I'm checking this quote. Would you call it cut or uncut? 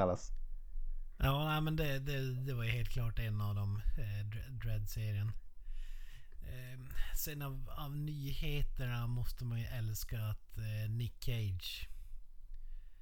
uncut